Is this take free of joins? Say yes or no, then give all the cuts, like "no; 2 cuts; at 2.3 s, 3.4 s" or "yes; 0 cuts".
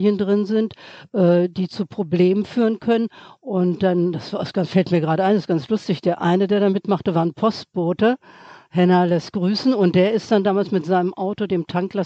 yes; 0 cuts